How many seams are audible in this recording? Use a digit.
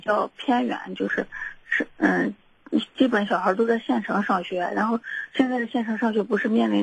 0